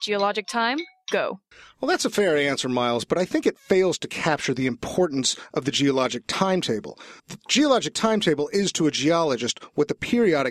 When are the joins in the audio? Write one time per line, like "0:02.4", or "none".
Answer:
0:01.5
0:07.2